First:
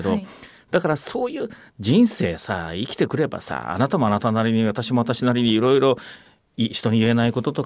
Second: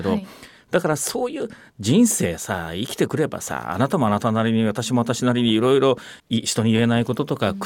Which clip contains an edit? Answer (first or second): second